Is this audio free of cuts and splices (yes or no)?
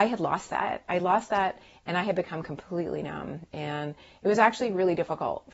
yes